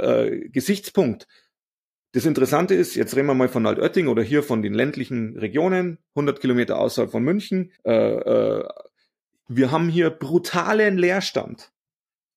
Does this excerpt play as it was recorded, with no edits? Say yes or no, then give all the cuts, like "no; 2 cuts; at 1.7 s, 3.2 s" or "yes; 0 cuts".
no; 1 cut; at 7.8 s